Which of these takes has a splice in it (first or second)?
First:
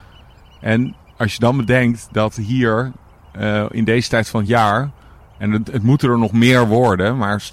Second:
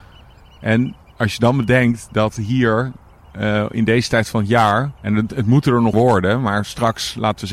second